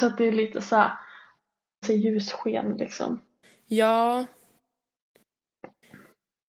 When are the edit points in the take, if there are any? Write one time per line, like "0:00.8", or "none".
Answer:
0:01.8